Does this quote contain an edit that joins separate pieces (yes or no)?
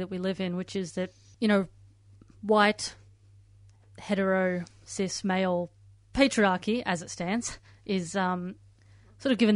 no